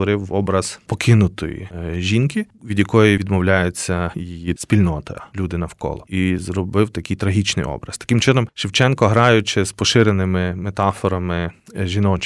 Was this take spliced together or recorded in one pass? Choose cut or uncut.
cut